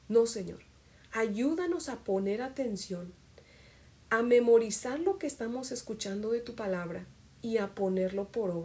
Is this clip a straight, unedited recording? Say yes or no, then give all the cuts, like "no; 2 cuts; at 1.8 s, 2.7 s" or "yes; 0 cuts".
yes; 0 cuts